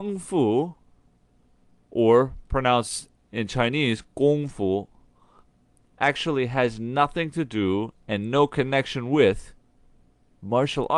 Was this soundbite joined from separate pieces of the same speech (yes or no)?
no